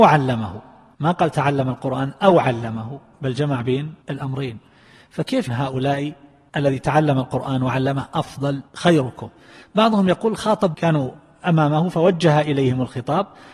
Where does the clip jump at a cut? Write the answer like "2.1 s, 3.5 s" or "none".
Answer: 4.0 s, 5.5 s, 8.7 s, 10.7 s